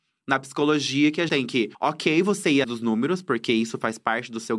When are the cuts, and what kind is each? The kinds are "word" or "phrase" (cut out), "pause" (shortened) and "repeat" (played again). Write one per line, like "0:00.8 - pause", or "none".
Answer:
0:01.3 - word
0:01.7 - pause
0:02.6 - word